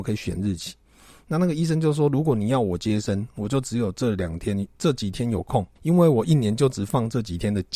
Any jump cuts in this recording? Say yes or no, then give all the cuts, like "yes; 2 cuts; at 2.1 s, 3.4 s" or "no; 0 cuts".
yes; 1 cut; at 5.8 s